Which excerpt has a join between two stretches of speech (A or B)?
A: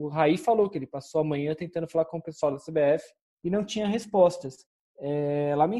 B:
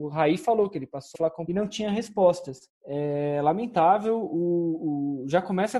B